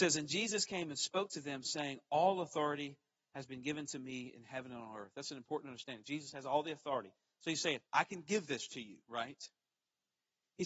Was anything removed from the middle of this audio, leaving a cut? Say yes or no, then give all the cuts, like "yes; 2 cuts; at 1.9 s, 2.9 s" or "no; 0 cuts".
yes; 1 cut; at 7.9 s